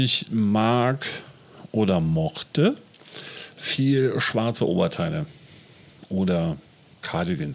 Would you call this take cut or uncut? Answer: uncut